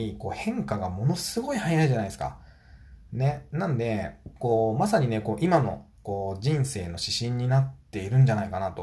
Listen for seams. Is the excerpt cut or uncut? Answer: cut